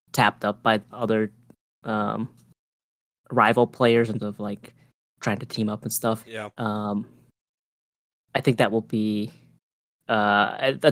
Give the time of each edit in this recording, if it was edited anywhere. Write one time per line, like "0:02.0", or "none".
0:00.9
0:04.2
0:06.2